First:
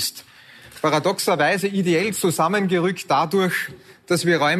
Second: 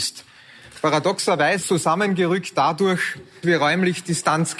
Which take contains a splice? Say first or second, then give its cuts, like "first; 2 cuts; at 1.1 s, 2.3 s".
second; 2 cuts; at 1.6 s, 3.4 s